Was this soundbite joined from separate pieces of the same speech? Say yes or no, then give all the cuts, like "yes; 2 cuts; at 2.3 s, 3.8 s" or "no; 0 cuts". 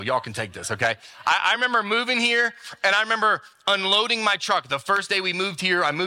no; 0 cuts